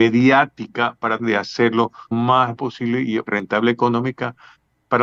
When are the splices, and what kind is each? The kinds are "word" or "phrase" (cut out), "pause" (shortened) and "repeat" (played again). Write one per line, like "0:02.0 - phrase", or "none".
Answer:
0:01.2 - word
0:02.1 - word
0:02.6 - word
0:03.3 - word